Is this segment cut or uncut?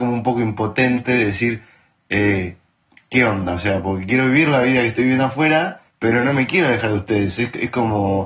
cut